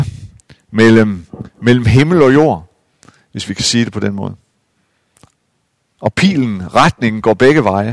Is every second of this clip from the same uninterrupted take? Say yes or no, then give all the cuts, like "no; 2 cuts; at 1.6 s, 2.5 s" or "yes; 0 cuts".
yes; 0 cuts